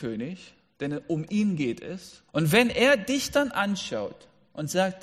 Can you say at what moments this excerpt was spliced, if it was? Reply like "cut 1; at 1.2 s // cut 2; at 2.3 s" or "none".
cut 1; at 2.3 s